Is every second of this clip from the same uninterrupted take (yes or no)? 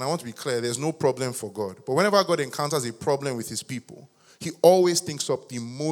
yes